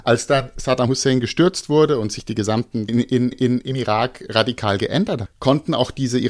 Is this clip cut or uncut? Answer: cut